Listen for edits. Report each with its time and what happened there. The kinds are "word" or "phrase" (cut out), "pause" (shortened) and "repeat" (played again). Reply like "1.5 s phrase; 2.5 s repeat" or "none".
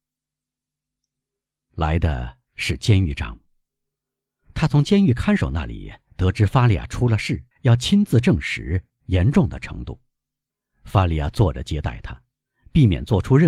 7.5 s pause; 10.5 s pause